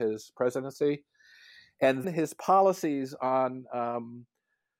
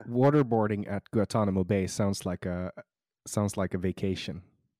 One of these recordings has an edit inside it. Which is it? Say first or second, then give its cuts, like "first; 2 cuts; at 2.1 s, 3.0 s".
first; 1 cut; at 2.0 s